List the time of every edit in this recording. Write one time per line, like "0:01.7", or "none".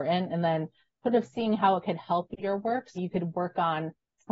0:03.0

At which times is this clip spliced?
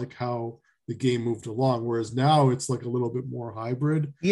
none

